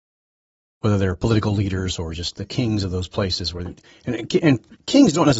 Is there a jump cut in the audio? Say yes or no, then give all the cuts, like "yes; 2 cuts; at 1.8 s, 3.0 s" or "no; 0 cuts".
no; 0 cuts